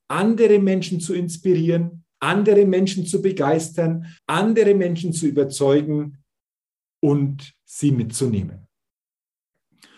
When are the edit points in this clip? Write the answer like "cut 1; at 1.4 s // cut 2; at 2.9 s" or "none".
cut 1; at 2.1 s // cut 2; at 4.2 s

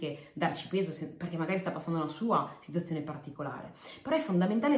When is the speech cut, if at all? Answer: none

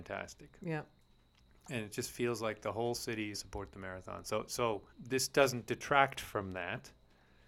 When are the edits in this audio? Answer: cut 1; at 3.3 s // cut 2; at 4.9 s

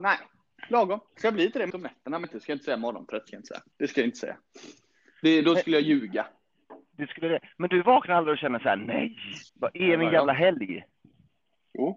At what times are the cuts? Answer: cut 1; at 1.1 s // cut 2; at 1.7 s // cut 3; at 2.2 s // cut 4; at 3.7 s // cut 5; at 9.5 s

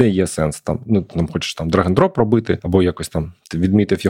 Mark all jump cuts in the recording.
none

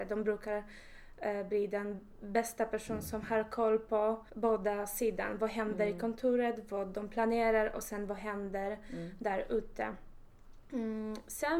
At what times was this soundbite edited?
cut 1; at 4.3 s

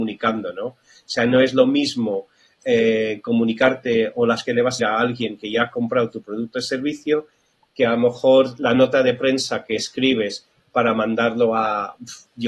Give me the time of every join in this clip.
cut 1; at 4.4 s // cut 2; at 4.8 s

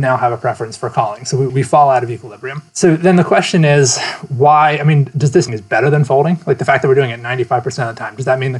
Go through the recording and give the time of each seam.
cut 1; at 1.5 s // cut 2; at 2.7 s // cut 3; at 5.5 s

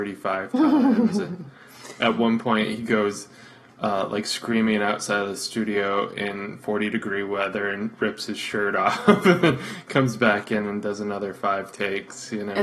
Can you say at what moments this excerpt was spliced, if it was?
none

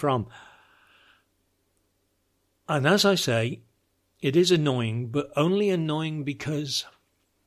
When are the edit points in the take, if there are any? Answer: none

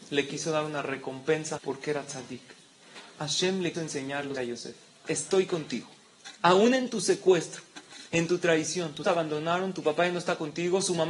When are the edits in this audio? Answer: cut 1; at 1.6 s // cut 2; at 3.7 s // cut 3; at 4.4 s // cut 4; at 6.4 s // cut 5; at 9.0 s

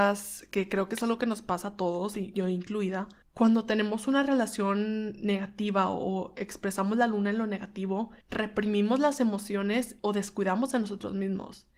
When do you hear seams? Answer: cut 1; at 3.2 s // cut 2; at 8.2 s

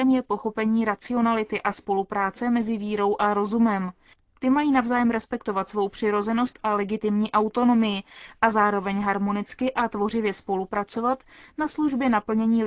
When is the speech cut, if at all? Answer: none

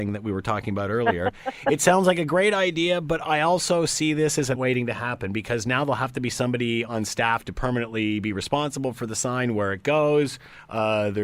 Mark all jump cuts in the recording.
cut 1; at 4.5 s

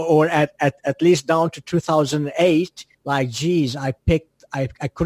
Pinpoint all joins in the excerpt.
cut 1; at 2.9 s

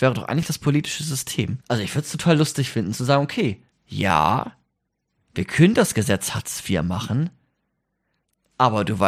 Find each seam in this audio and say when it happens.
cut 1; at 1.6 s // cut 2; at 3.7 s

